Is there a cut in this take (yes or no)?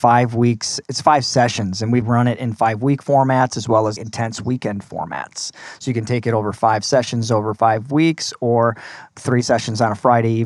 yes